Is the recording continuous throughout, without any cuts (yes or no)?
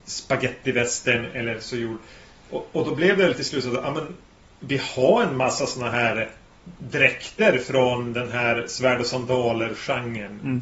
yes